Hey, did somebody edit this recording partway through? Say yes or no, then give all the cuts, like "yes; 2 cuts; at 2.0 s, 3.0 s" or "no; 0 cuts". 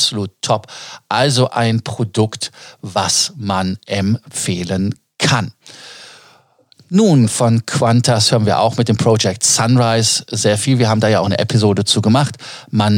no; 0 cuts